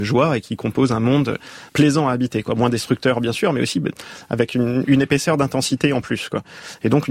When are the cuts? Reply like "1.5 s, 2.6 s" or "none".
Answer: 1.7 s, 4.8 s

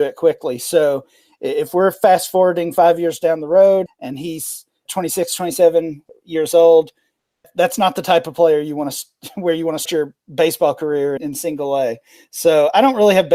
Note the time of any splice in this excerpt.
3.9 s, 4.9 s, 9.9 s, 11.2 s

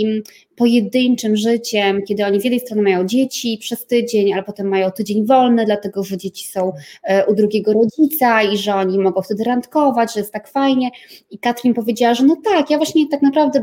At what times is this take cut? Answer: none

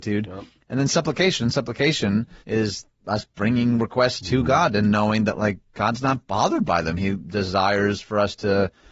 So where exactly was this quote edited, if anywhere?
2.4 s

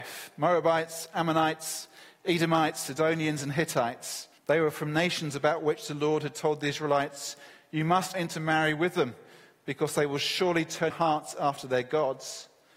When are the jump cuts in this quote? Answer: 4.4 s, 8.1 s, 10.9 s

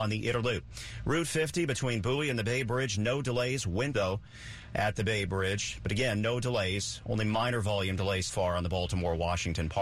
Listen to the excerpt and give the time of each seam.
3.9 s, 8.3 s

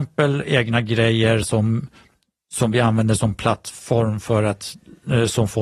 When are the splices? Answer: none

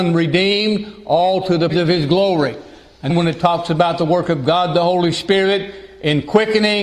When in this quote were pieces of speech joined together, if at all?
1.7 s, 3.1 s

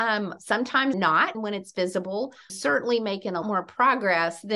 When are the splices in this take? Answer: 0.9 s, 1.3 s, 2.5 s, 3.4 s

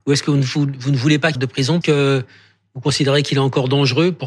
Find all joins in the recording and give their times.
1.4 s, 1.8 s

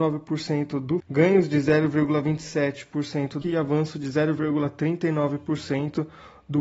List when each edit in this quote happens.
1.0 s, 3.4 s

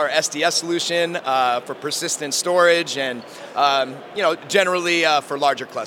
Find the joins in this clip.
none

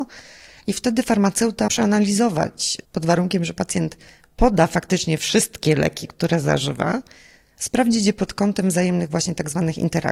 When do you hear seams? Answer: 1.7 s, 2.8 s

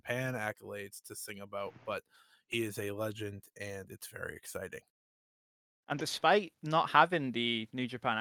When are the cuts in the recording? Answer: none

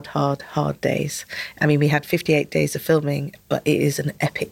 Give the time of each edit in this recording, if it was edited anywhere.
none

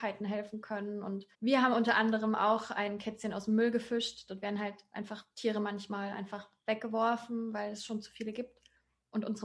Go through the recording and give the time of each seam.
1.3 s

